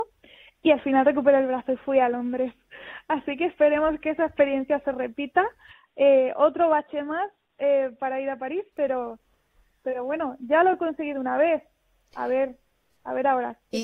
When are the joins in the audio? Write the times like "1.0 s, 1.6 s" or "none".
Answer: none